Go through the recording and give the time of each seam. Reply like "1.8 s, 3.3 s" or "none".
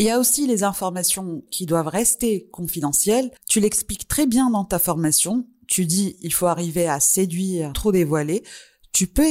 1.5 s, 3.4 s, 7.7 s

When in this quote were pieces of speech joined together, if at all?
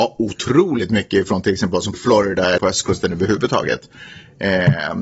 1.9 s, 2.6 s

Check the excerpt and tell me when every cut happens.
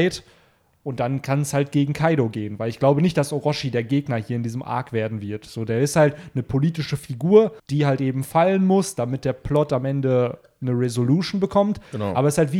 7.6 s

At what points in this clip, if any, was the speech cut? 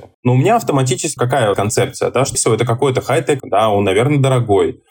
1.2 s, 1.5 s, 2.3 s, 3.4 s

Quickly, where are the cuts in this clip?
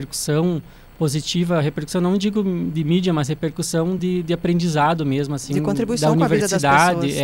none

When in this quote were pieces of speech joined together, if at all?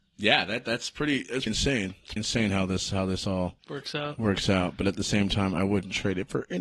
1.5 s, 2.2 s, 3.6 s

